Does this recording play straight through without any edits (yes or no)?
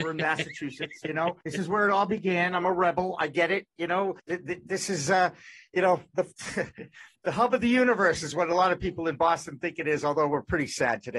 no